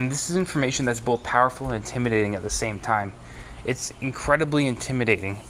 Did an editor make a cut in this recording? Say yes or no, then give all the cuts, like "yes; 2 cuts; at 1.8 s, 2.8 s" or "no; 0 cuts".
no; 0 cuts